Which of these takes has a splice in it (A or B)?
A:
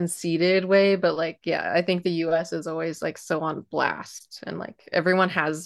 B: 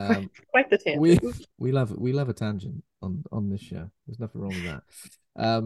B